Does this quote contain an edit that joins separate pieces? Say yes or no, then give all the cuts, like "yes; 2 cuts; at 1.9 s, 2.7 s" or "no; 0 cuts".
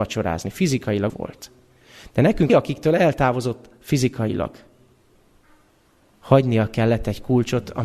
yes; 2 cuts; at 1.1 s, 2.5 s